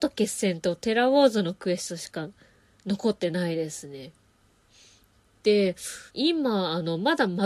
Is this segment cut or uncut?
cut